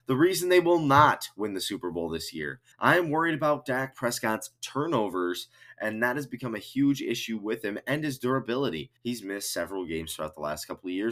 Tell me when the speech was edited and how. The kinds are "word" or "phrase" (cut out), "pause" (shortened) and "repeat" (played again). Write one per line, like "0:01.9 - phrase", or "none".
0:02.7 - pause
0:09.0 - pause

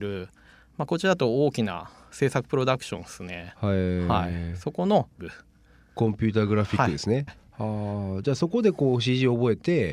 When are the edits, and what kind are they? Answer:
0:05.2 - word
0:07.3 - phrase

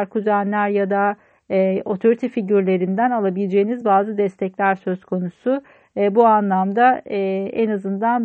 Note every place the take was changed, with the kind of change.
none

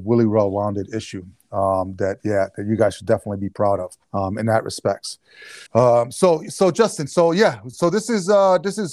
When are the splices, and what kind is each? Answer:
0:04.0 - pause
0:05.7 - pause

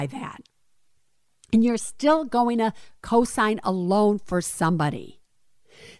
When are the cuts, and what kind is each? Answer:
none

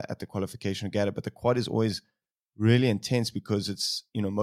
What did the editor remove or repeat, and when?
none

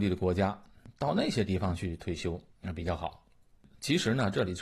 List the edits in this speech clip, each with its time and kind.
0:02.5 - pause

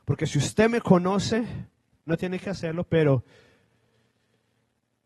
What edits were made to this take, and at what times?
0:02.1 - word

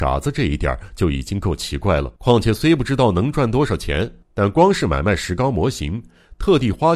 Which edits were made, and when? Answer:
0:02.2 - pause
0:04.2 - pause

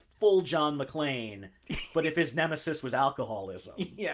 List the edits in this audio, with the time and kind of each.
none

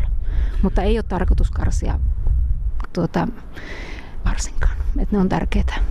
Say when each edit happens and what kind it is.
0:02.8 - word
0:04.2 - word

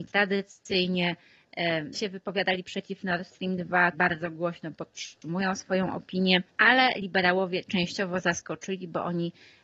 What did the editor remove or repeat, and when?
0:01.9 - word
0:03.9 - word
0:06.5 - pause

